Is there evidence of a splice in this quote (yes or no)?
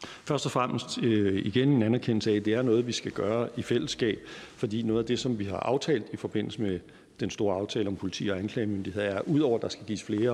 no